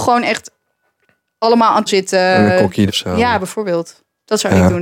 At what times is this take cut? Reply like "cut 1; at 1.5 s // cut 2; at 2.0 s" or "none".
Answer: cut 1; at 1.9 s // cut 2; at 2.9 s